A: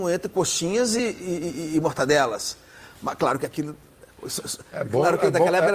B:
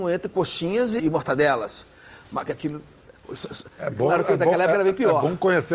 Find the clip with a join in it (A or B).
B